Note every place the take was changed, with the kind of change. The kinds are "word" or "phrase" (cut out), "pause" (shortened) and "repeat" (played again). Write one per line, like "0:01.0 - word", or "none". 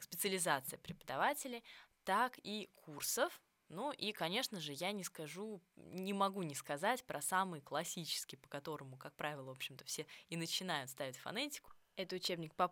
none